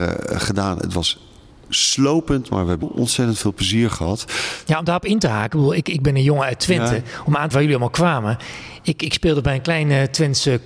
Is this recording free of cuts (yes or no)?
no